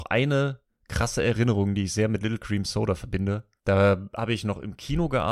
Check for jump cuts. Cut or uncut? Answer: cut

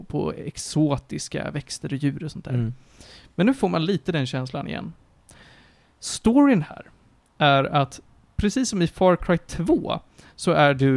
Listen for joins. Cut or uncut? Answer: uncut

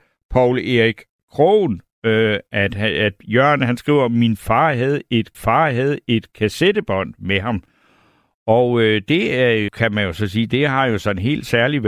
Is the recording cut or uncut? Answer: cut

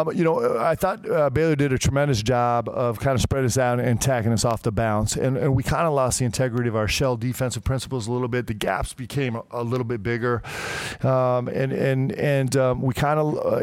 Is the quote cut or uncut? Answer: uncut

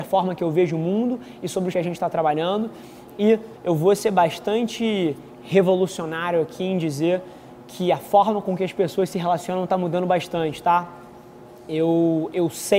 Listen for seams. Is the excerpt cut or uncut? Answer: cut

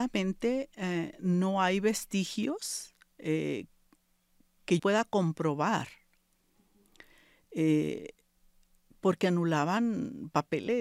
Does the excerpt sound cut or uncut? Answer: cut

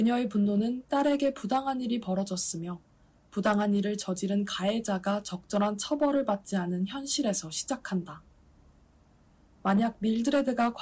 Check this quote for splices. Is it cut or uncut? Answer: uncut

